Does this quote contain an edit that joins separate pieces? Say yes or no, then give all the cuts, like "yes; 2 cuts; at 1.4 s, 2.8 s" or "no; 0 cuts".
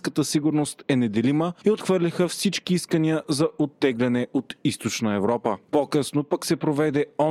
no; 0 cuts